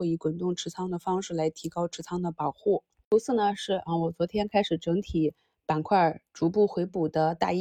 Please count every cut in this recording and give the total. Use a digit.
0